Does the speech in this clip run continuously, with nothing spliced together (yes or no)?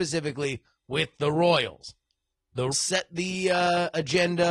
no